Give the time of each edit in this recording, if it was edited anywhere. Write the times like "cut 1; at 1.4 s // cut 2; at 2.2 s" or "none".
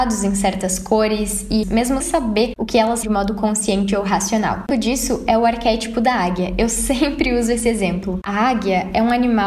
cut 1; at 1.6 s // cut 2; at 2.0 s // cut 3; at 3.0 s // cut 4; at 4.7 s